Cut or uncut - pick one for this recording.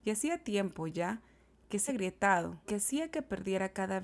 cut